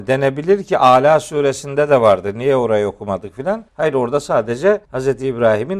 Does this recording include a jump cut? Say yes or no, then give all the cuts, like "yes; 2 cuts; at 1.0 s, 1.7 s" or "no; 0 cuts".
yes; 2 cuts; at 3.7 s, 4.8 s